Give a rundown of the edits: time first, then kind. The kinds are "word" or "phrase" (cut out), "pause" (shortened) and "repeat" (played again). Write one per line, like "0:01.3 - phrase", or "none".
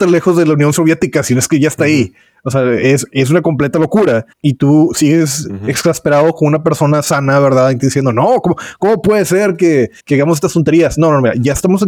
0:04.3 - pause
0:10.0 - pause

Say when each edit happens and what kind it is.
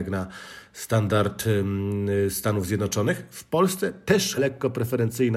0:04.4 - word

